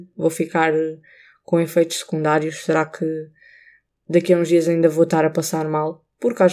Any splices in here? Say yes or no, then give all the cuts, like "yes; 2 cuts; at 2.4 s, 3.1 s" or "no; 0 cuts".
no; 0 cuts